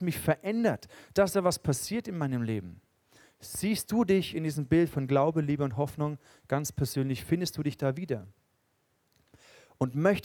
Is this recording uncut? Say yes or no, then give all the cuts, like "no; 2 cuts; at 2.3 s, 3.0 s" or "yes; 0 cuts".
yes; 0 cuts